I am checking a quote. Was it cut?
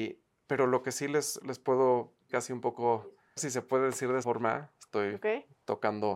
yes; 4 cuts; at 1.4 s, 2.3 s, 3.4 s, 4.2 s

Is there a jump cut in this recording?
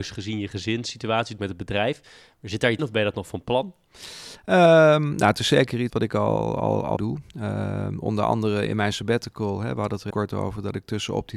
yes; 6 cuts; at 1.4 s, 2.8 s, 5.9 s, 7.0 s, 8.7 s, 10.1 s

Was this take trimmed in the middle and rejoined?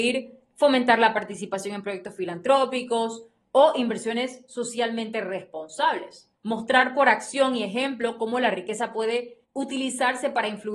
yes; 2 cuts; at 6.4 s, 9.4 s

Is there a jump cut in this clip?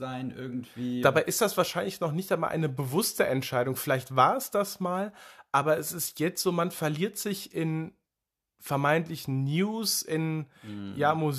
no; 0 cuts

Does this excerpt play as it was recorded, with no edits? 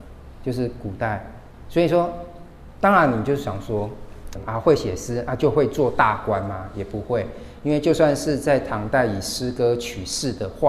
no; 1 cut; at 4.4 s

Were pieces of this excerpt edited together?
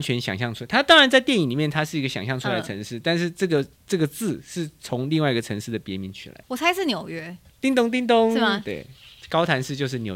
yes; 1 cut; at 7.5 s

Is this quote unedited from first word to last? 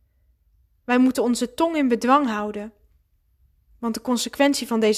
yes; 0 cuts

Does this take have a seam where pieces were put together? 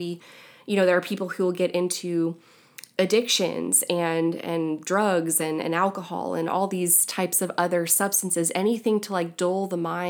no; 0 cuts

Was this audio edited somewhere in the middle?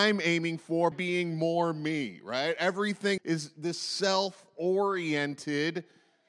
yes; 2 cuts; at 0.9 s, 3.2 s

